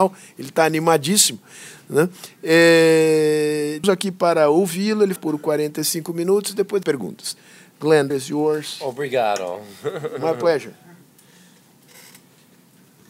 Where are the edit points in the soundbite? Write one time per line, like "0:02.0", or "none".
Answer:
0:03.8
0:05.2
0:06.8
0:08.1